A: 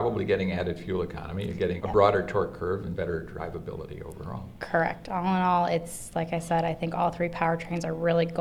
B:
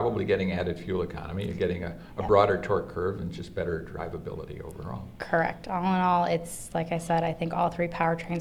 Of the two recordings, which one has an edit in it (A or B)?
A